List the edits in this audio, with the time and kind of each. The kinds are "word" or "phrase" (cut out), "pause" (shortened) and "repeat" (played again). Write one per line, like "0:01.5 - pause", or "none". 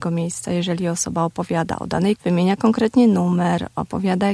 0:02.2 - word